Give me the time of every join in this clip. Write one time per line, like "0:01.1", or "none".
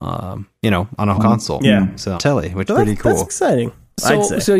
0:01.2
0:01.6
0:02.2
0:02.7
0:03.3